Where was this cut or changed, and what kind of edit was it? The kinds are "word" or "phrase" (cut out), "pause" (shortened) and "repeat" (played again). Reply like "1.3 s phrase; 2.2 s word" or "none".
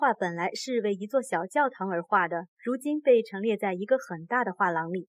2.5 s pause